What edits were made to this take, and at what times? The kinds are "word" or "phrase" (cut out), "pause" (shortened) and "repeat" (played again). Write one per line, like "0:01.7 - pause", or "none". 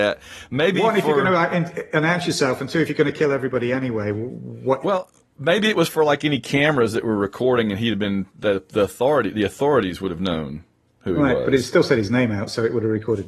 none